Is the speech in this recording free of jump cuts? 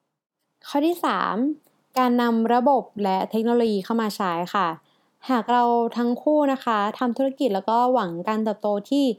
yes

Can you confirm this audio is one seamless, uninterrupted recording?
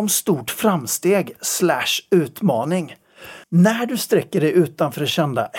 no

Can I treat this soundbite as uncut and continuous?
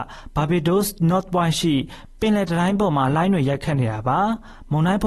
yes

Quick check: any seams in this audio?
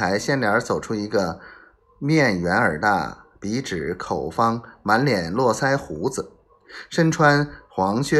no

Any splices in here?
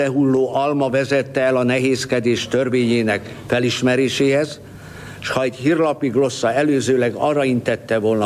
no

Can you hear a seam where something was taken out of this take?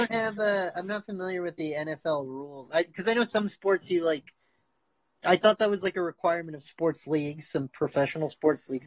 yes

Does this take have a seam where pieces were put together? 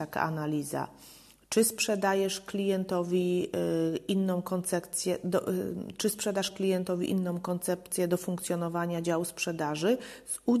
no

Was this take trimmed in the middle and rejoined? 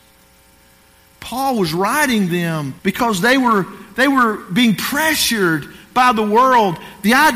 yes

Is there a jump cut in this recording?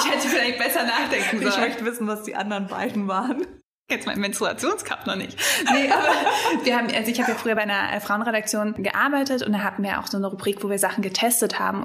no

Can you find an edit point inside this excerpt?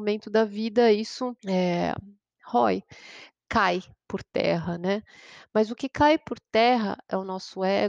yes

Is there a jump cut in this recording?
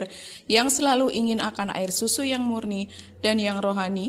no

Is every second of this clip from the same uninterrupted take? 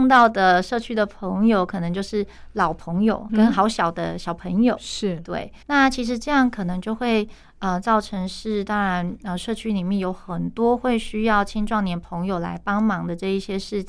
no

